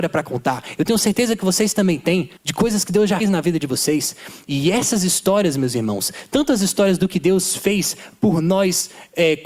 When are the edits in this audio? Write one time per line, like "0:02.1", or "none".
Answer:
0:02.4
0:03.2